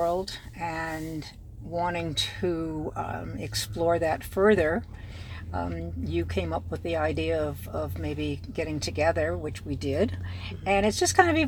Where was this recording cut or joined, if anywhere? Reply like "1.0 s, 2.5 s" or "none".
none

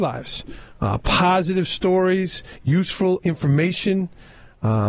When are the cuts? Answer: none

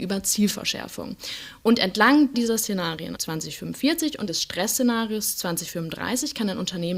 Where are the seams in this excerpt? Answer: 2.3 s, 3.2 s, 4.3 s

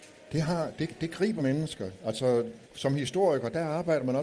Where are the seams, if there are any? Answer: 1.4 s, 2.6 s

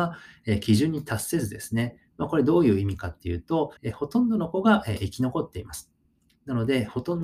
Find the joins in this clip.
3.8 s

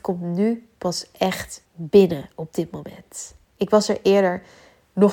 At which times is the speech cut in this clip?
1.6 s, 3.4 s

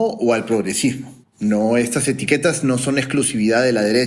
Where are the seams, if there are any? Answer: 1.2 s

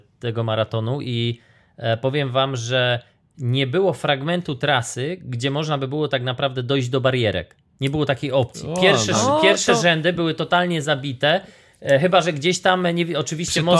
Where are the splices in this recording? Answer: none

